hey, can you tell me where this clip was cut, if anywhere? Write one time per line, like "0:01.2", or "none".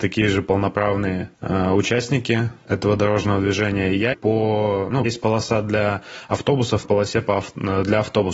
0:01.3
0:04.1
0:05.1
0:06.8